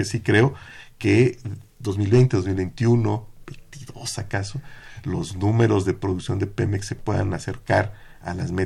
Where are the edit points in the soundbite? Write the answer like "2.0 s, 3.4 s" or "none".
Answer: none